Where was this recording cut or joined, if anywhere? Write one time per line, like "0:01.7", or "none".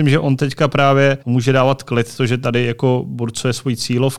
0:01.2